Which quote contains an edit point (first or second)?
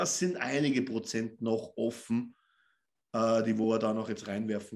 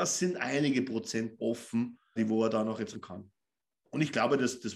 second